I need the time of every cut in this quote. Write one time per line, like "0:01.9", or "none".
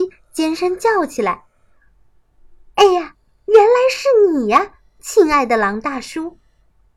none